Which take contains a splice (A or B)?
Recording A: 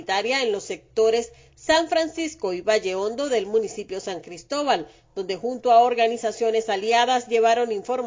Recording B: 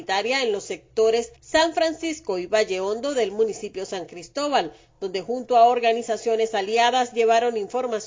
B